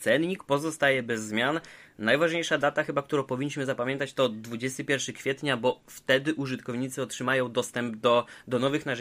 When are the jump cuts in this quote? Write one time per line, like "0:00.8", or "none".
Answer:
none